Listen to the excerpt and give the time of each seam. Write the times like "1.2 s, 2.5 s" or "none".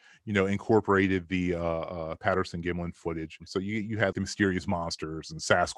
4.1 s